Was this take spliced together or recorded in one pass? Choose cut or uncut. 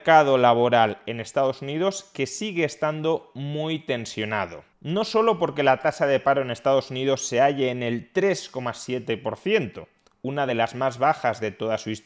uncut